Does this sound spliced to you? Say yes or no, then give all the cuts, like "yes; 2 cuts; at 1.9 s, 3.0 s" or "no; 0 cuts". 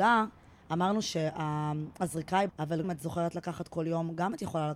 yes; 2 cuts; at 2.5 s, 2.8 s